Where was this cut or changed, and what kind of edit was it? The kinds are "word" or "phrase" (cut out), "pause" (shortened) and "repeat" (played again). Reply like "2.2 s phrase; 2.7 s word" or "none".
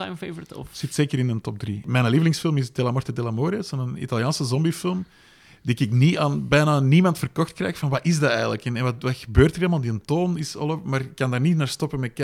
none